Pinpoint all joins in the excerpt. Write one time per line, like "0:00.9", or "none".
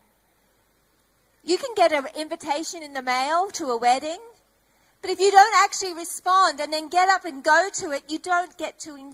none